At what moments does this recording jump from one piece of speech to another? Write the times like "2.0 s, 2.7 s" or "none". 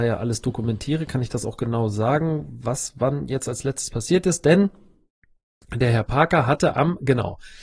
none

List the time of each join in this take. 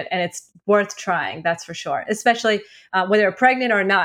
none

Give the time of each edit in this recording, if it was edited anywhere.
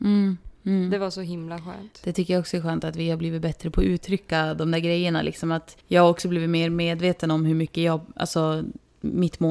5.8 s

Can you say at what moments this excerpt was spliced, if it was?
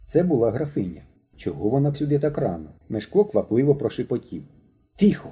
1.2 s, 1.9 s, 2.8 s

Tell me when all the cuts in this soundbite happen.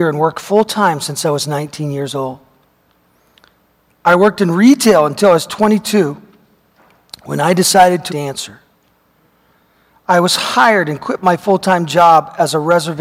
8.1 s

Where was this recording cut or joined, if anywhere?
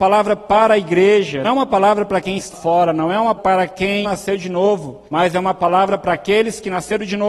1.4 s, 2.5 s, 3.4 s, 4.0 s, 5.1 s

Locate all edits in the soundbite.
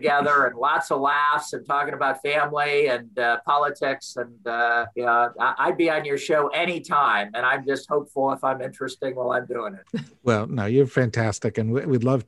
4.9 s

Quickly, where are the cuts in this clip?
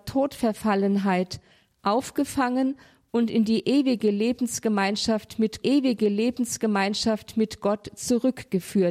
5.6 s

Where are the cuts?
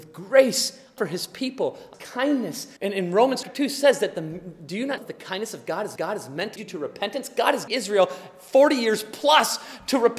1.0 s, 1.9 s, 2.8 s, 3.4 s, 5.0 s, 6.0 s, 6.6 s, 7.7 s

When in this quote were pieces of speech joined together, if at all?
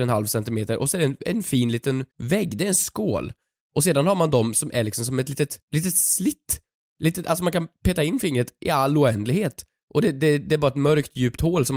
2.1 s, 5.6 s

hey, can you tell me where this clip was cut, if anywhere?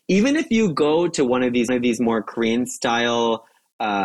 1.7 s

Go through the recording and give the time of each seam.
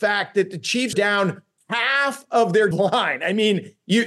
0.9 s, 1.6 s, 2.7 s

